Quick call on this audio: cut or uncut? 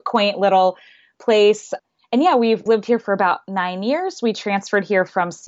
uncut